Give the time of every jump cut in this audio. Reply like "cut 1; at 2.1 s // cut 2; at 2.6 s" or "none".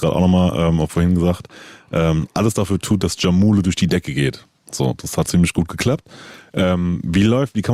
cut 1; at 5.3 s